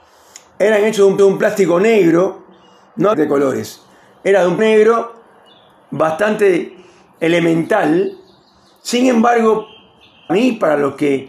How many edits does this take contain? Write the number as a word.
four